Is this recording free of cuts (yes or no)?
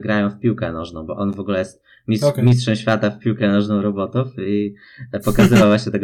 yes